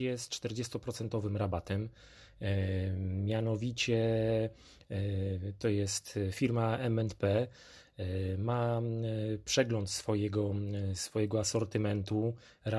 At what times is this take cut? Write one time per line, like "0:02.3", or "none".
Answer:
none